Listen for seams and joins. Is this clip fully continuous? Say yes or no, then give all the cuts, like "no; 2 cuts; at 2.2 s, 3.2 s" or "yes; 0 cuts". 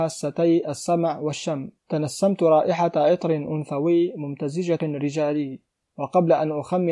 no; 2 cuts; at 1.8 s, 4.8 s